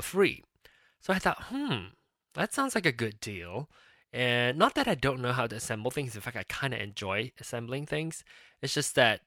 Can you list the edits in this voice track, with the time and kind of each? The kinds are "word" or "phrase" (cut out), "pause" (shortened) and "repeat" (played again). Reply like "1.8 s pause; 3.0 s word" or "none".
none

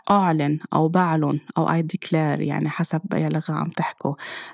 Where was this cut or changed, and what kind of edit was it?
none

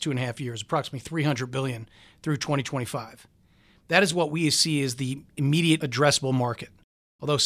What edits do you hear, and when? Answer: none

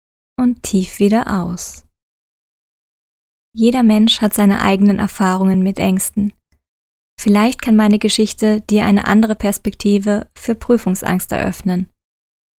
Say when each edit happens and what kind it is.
none

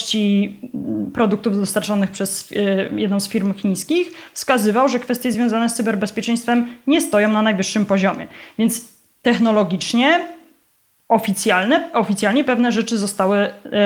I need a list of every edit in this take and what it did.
none

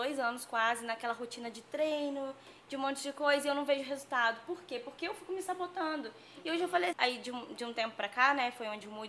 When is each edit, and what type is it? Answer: 6.9 s word

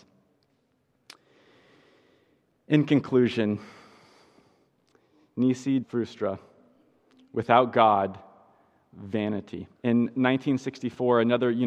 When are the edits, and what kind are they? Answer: 5.8 s word; 9.7 s pause

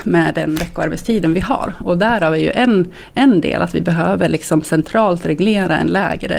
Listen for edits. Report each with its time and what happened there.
none

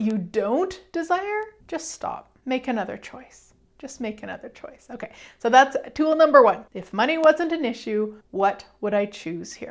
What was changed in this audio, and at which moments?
1.6 s pause; 2.4 s pause; 6.7 s pause; 8.2 s pause

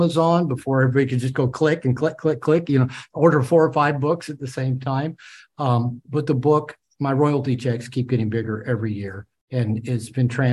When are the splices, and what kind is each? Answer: none

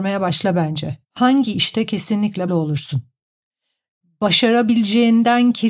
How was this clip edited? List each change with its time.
1.0 s pause; 2.5 s word

